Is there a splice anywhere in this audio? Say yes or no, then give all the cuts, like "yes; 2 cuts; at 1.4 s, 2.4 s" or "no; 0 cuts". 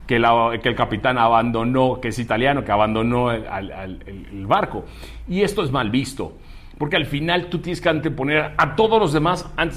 no; 0 cuts